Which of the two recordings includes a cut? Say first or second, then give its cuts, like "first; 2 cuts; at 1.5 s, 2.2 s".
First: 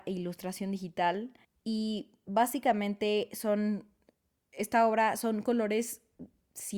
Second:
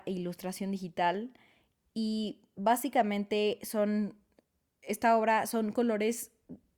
first; 1 cut; at 1.4 s